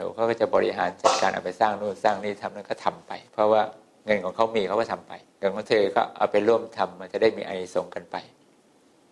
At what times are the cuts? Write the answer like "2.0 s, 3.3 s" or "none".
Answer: 3.3 s, 5.2 s